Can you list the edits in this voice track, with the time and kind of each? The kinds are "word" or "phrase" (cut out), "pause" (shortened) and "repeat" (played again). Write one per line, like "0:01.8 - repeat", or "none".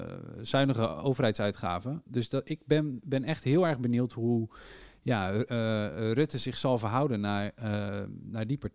none